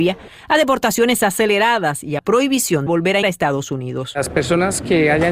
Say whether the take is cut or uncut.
cut